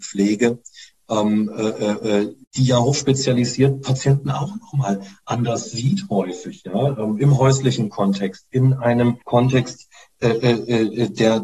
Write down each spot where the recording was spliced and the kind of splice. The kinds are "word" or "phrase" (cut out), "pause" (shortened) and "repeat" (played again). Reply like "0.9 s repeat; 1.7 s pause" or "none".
2.4 s pause; 9.2 s pause

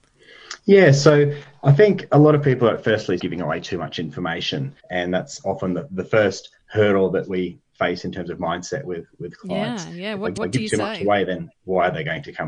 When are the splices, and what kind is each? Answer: 3.2 s phrase; 4.8 s pause; 10.4 s repeat

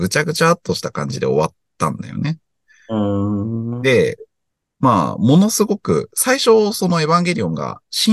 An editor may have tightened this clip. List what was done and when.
none

